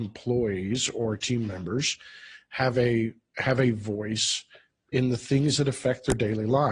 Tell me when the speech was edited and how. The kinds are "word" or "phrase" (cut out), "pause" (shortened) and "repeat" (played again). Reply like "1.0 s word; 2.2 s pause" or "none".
none